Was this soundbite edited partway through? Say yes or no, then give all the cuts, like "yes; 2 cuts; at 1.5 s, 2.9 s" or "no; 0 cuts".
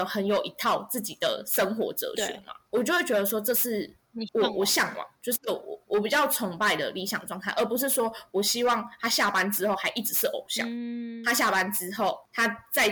yes; 1 cut; at 5.2 s